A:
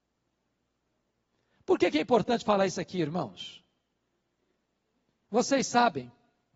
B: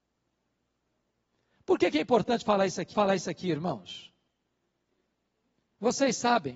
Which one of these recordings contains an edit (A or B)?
B